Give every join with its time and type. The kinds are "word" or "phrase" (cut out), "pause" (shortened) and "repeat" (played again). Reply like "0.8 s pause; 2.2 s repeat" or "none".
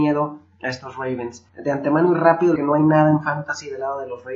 1.5 s pause; 2.6 s phrase

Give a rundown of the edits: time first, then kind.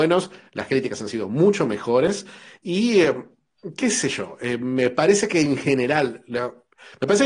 none

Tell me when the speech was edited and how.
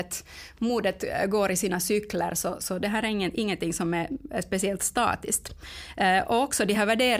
none

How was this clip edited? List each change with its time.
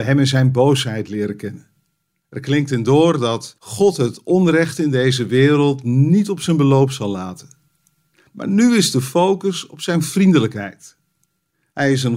3.6 s pause

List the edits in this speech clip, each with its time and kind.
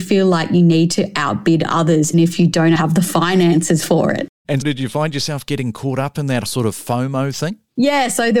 2.1 s word; 2.8 s word; 4.6 s word; 6.5 s word

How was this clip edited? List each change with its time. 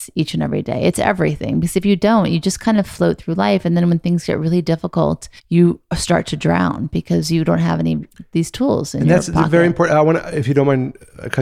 5.4 s pause

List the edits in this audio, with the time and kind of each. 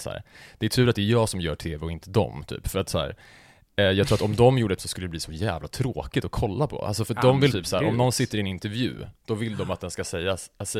4.8 s word; 7.5 s word

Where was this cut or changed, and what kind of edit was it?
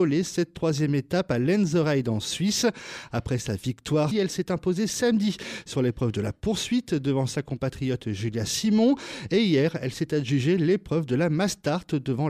4.1 s phrase

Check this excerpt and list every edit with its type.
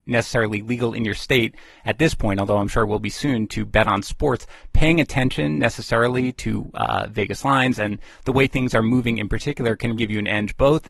10.0 s word

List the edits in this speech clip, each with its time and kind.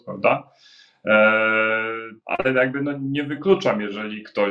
2.2 s pause

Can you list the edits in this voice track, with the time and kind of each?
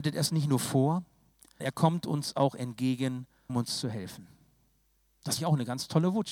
1.6 s word; 3.5 s word; 5.4 s word

